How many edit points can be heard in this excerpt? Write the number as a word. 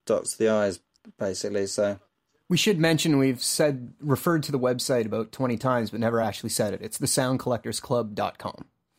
zero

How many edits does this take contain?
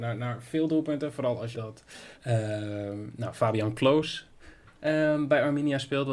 two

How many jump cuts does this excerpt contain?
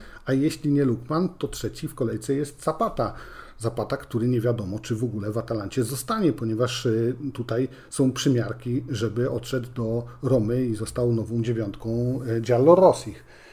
zero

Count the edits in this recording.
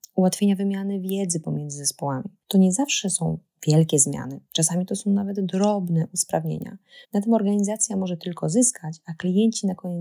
two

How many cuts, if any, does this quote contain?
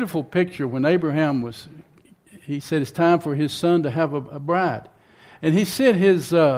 zero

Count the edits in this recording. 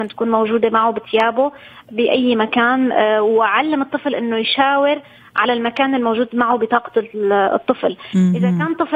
zero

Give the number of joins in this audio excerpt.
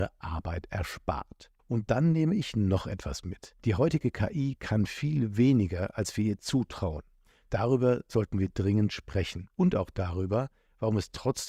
three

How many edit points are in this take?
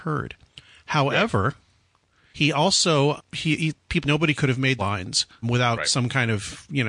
six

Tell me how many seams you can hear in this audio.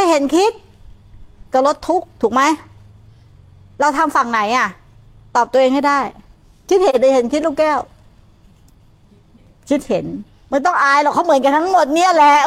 one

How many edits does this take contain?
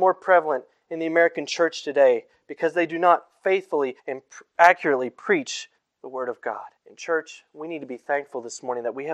three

